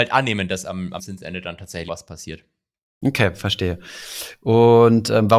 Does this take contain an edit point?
yes; 2 cuts; at 1.0 s, 1.9 s

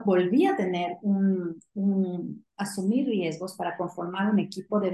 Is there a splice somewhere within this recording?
no; 0 cuts

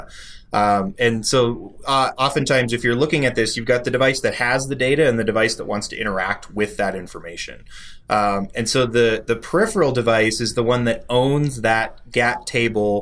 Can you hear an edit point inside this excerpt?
no; 0 cuts

